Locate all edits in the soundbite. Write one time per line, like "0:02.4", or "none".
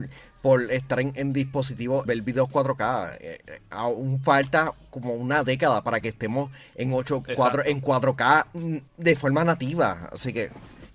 0:02.1
0:07.3
0:08.9